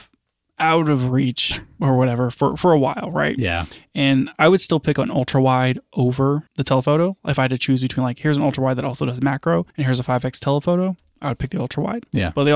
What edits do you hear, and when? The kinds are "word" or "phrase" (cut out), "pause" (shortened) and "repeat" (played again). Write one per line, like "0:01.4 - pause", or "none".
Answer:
0:06.5 - pause
0:09.7 - pause